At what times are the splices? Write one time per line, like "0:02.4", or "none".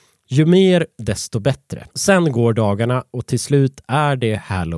0:01.9